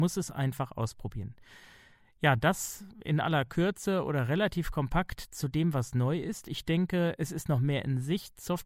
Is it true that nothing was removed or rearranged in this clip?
yes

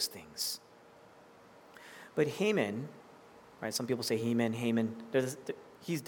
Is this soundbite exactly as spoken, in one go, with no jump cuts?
yes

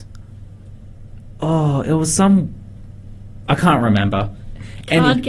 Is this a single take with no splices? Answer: yes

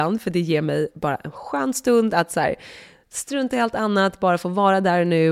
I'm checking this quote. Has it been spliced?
no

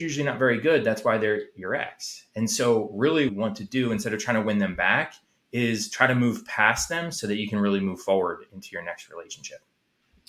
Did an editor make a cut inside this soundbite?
yes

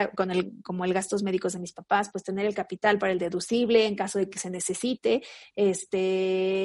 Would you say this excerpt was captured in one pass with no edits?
yes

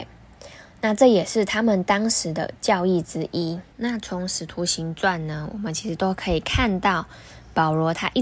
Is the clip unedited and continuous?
no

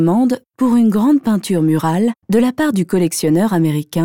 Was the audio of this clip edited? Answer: yes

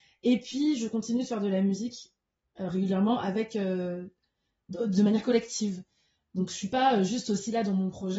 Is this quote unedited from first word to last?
yes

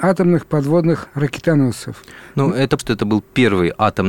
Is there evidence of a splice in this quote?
yes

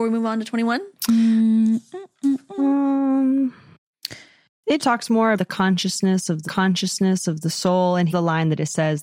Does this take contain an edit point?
yes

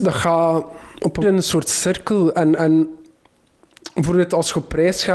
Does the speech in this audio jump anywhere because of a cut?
yes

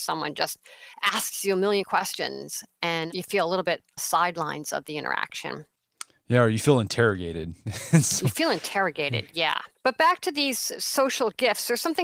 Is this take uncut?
no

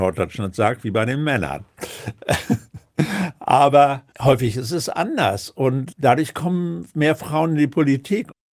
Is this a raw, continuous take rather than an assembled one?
no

